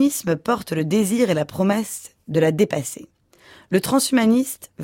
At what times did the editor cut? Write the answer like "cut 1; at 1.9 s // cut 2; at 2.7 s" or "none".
none